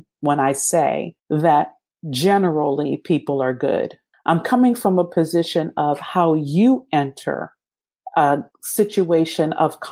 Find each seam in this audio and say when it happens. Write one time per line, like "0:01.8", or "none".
0:01.2
0:04.1